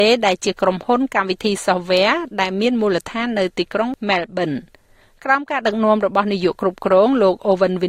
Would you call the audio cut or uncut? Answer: uncut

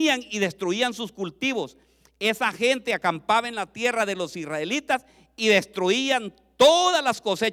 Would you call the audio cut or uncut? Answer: uncut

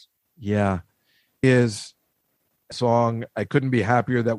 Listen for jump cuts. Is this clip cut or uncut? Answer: cut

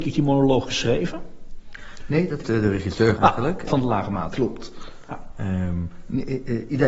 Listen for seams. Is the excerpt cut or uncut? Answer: cut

